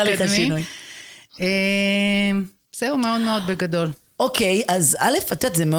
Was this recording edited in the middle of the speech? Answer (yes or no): no